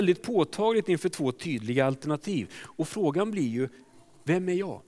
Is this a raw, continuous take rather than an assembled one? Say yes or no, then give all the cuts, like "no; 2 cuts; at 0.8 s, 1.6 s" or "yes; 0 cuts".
yes; 0 cuts